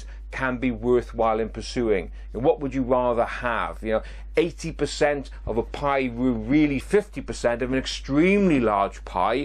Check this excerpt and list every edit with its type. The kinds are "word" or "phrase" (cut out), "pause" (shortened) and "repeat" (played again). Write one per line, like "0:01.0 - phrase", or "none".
0:06.8 - phrase